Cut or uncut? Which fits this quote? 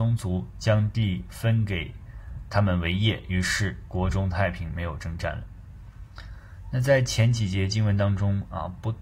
cut